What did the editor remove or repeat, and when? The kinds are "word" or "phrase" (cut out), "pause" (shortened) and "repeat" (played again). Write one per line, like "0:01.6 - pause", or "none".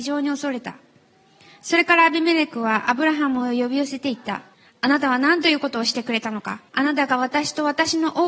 0:04.5 - pause
0:06.7 - pause

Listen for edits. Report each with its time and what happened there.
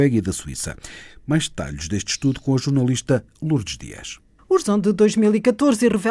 0:04.6 - word

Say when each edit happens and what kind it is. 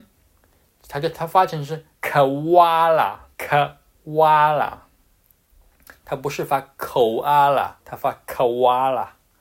0:01.9 - pause
0:03.3 - pause
0:07.8 - pause

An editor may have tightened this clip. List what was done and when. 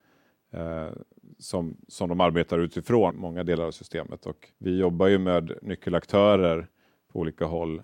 0:03.1 - word
0:04.5 - pause

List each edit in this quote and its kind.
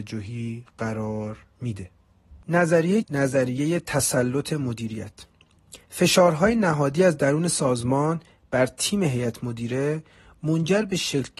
0:03.0 - word
0:05.8 - pause

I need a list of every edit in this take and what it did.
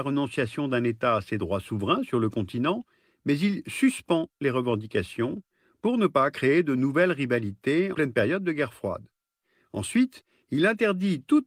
0:07.9 - word

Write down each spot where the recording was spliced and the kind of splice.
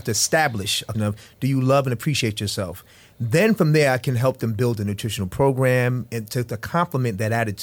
0:00.9 - word

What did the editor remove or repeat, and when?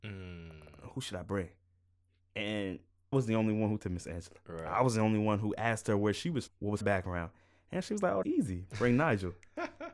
0:03.1 - word
0:03.8 - word
0:06.5 - word
0:06.8 - word
0:08.2 - word

